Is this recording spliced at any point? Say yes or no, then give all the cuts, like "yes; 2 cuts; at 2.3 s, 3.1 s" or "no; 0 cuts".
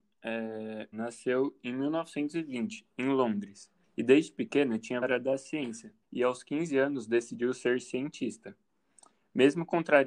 yes; 4 cuts; at 0.9 s, 3.8 s, 5.0 s, 6.0 s